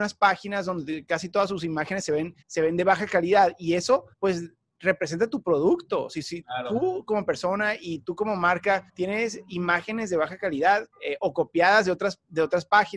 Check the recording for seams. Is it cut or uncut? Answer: cut